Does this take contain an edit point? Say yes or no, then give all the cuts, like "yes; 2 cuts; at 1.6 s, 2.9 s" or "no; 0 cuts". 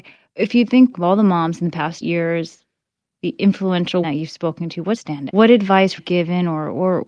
yes; 6 cuts; at 0.9 s, 2.0 s, 4.0 s, 5.0 s, 5.3 s, 6.0 s